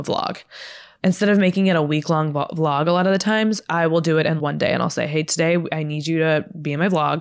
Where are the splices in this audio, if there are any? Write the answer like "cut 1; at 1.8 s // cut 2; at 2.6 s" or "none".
cut 1; at 4.4 s

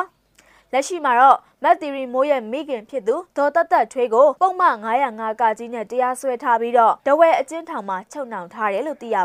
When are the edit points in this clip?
cut 1; at 3.3 s // cut 2; at 4.4 s // cut 3; at 7.0 s

